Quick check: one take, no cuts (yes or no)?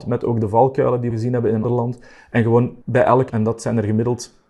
no